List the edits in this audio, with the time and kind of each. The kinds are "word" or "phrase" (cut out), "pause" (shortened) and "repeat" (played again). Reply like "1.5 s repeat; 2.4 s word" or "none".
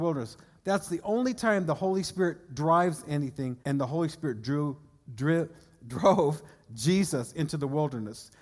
3.6 s pause